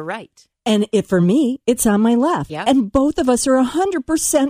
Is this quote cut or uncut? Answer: uncut